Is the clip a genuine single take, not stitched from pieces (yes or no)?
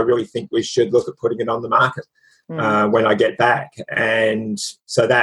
yes